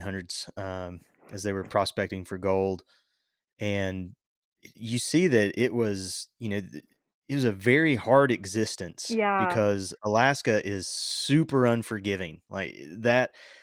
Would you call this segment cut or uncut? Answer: uncut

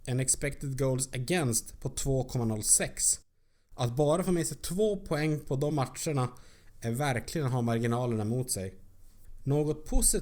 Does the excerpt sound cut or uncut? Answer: uncut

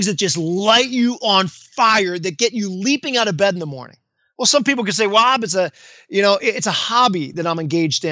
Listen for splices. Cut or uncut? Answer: uncut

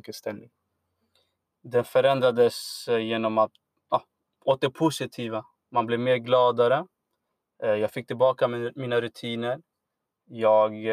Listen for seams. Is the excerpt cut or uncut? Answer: uncut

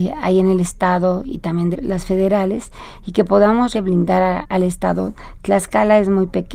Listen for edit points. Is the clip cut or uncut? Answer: cut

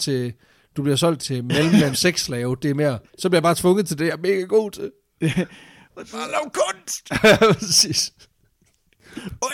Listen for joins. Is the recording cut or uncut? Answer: cut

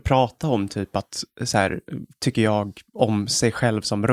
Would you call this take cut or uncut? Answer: uncut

